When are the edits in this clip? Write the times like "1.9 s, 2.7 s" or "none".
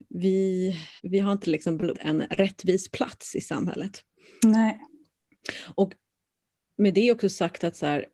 1.0 s, 1.4 s, 1.9 s